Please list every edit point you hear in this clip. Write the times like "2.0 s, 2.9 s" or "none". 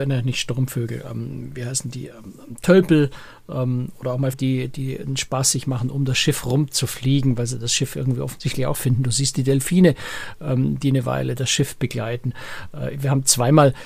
4.3 s, 8.7 s